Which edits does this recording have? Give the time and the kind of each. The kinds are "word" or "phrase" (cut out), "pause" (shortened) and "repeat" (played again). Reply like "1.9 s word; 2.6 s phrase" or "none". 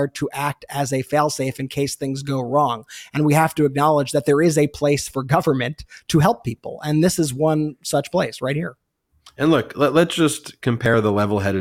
none